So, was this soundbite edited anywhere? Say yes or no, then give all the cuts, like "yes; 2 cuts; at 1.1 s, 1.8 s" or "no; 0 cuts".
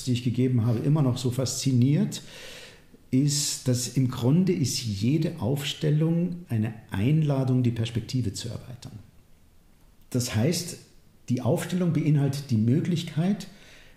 no; 0 cuts